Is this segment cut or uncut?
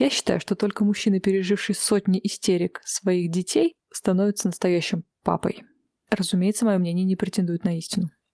uncut